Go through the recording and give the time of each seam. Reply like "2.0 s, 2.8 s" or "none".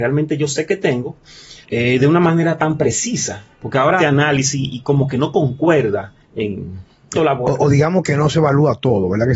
1.6 s, 3.5 s, 4.0 s, 6.2 s, 7.2 s

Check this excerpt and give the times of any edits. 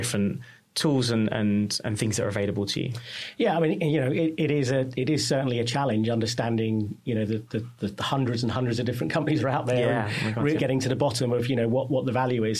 10.6 s

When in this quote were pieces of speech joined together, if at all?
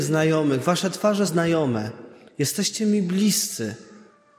1.3 s

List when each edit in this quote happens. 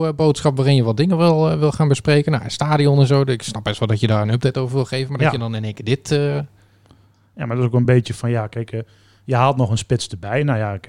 none

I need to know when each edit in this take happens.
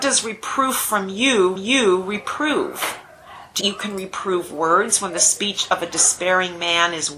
1.6 s, 3.6 s

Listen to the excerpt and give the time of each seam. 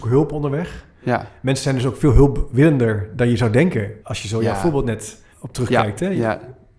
4.0 s, 5.3 s

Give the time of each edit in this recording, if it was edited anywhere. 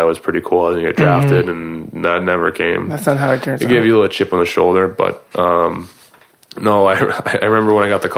none

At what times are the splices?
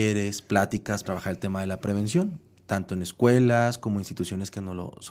1.0 s

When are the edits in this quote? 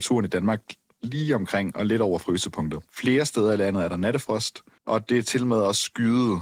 2.9 s, 4.8 s

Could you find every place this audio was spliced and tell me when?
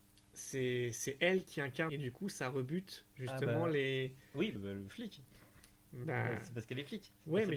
1.9 s, 4.6 s

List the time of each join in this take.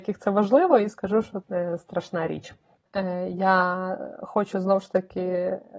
1.4 s

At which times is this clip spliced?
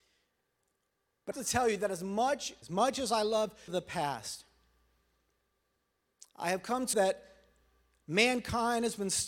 1.3 s, 2.6 s, 3.7 s, 6.3 s, 6.9 s

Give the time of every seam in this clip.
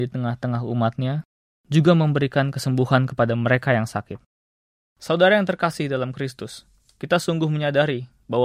none

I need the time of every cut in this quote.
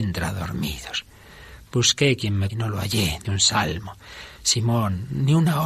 2.5 s, 3.2 s

